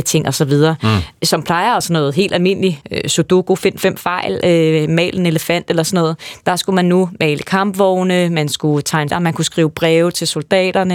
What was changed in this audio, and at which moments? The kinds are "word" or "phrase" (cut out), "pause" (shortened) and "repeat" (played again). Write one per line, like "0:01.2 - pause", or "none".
0:01.8 - word
0:02.8 - pause
0:09.1 - word